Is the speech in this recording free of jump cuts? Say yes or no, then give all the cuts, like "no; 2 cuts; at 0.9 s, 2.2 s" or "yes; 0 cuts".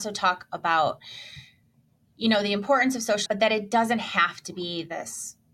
no; 1 cut; at 3.3 s